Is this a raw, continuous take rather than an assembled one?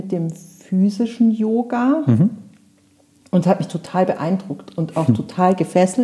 yes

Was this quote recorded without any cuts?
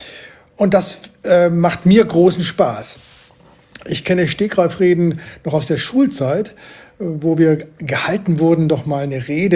yes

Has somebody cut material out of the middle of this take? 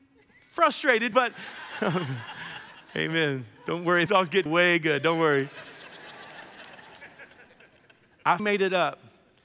yes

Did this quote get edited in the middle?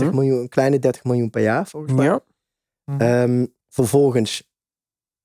yes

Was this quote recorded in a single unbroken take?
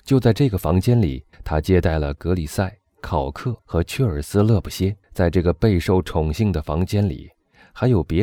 no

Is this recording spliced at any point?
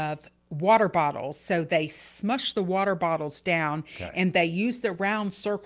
no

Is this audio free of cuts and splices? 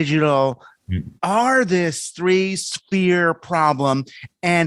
no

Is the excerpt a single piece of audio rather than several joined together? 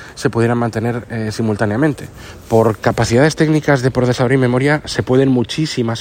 yes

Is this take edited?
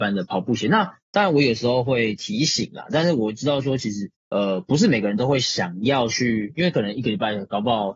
yes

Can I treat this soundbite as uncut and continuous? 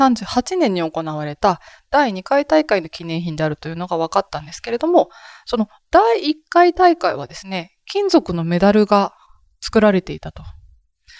yes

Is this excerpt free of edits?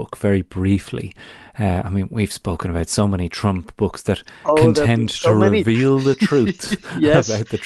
yes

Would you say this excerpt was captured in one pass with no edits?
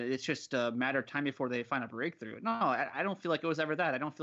yes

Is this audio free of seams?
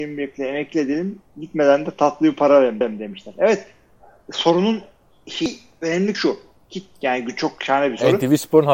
no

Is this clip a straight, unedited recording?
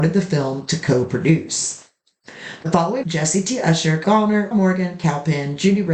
no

